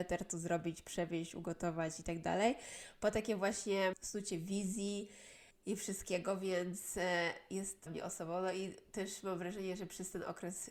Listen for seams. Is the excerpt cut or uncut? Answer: cut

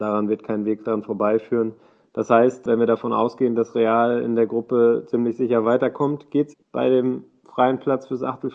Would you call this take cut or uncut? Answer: cut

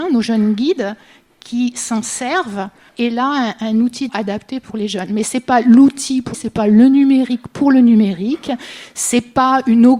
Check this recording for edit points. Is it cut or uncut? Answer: cut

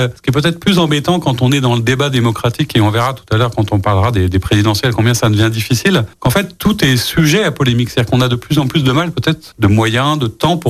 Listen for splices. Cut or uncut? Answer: uncut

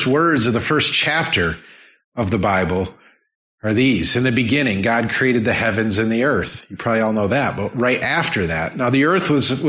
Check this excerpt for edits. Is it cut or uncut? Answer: uncut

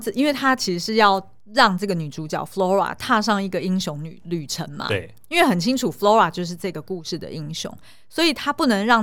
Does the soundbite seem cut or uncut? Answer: uncut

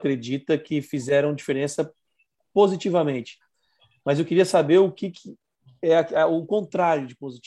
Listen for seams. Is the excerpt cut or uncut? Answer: uncut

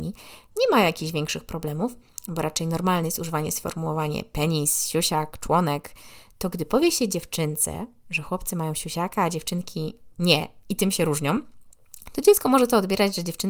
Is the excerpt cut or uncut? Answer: uncut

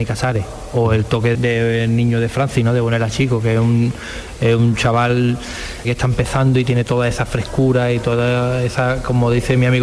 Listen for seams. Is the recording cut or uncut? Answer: cut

